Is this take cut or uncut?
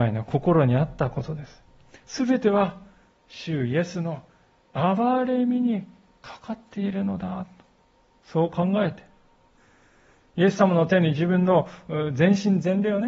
uncut